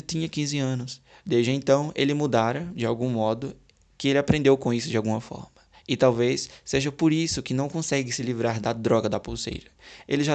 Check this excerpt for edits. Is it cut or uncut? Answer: uncut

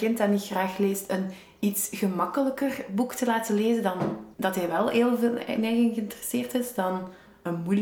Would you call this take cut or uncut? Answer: cut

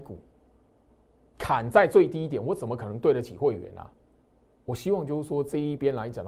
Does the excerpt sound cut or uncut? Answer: cut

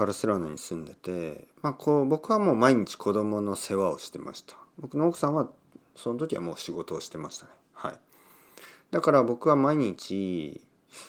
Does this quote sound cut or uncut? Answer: uncut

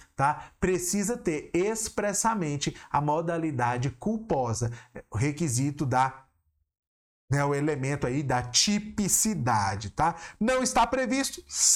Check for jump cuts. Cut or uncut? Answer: uncut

